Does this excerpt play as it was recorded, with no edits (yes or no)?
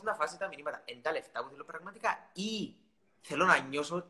no